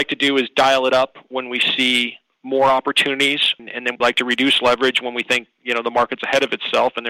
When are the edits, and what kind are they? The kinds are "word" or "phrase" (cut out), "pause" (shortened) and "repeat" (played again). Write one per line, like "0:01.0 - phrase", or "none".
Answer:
0:04.0 - word